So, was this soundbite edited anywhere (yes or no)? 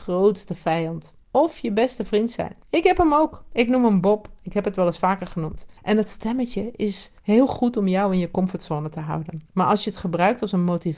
yes